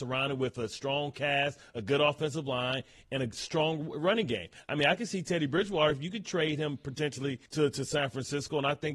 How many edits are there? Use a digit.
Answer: 1